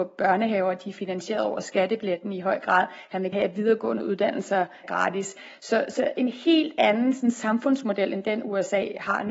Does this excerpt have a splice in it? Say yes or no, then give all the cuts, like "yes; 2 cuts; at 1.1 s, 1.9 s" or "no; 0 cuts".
yes; 2 cuts; at 3.3 s, 4.8 s